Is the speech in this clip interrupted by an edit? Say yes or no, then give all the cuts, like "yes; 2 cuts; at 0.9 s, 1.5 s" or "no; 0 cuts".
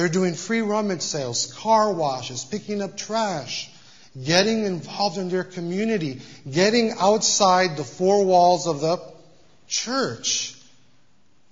no; 0 cuts